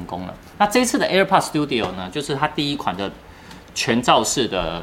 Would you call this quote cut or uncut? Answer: uncut